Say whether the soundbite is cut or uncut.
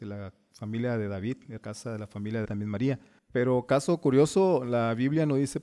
cut